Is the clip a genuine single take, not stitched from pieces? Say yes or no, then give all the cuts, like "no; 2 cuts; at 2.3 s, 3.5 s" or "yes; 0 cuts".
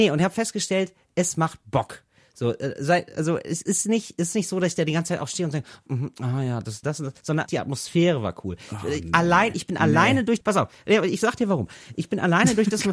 no; 4 cuts; at 5.9 s, 6.8 s, 7.5 s, 10.4 s